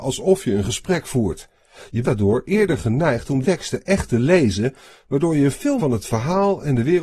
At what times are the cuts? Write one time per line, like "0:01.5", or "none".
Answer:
0:02.0
0:03.4
0:05.8